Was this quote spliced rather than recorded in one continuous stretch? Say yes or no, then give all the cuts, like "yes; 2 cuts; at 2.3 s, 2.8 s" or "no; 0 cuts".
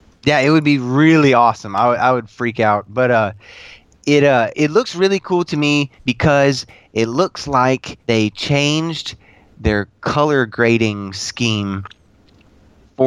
yes; 3 cuts; at 4.5 s, 6.0 s, 8.0 s